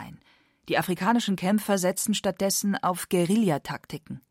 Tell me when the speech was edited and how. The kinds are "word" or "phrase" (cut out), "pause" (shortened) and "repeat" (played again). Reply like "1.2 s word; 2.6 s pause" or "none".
none